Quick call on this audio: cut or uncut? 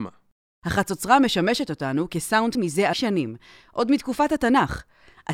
cut